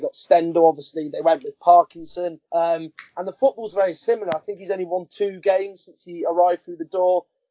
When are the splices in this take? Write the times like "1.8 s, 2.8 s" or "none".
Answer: 2.5 s